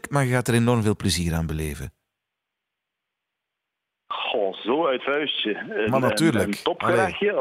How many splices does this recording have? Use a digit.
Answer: 1